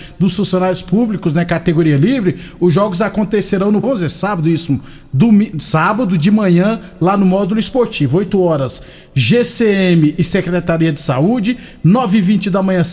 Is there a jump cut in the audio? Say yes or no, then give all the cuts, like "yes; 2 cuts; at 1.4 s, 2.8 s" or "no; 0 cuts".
yes; 1 cut; at 3.8 s